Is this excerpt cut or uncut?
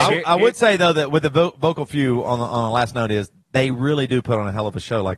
uncut